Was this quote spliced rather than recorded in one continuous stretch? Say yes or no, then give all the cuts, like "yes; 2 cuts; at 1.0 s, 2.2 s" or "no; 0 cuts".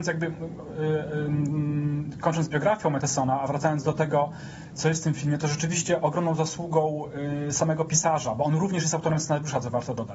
no; 0 cuts